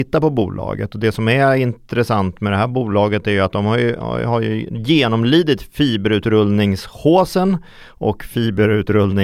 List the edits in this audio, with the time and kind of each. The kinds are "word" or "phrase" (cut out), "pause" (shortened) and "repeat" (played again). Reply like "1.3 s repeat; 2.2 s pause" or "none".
none